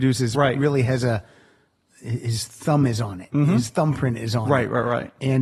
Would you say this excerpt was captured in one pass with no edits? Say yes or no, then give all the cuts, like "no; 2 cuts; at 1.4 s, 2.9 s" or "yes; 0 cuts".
yes; 0 cuts